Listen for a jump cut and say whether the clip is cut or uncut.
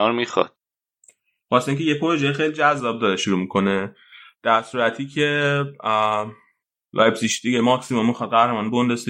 uncut